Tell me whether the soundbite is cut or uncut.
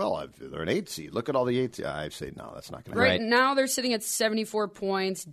uncut